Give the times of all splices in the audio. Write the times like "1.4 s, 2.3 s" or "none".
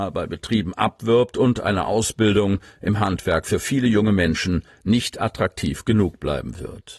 none